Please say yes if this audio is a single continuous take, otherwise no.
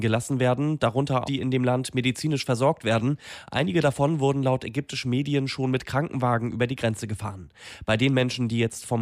no